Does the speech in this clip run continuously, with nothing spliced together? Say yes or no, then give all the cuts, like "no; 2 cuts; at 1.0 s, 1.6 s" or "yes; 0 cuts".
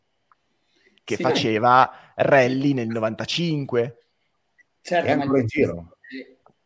yes; 0 cuts